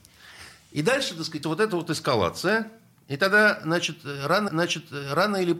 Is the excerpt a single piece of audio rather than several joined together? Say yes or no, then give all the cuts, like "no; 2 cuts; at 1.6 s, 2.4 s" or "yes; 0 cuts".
no; 2 cuts; at 1.4 s, 4.5 s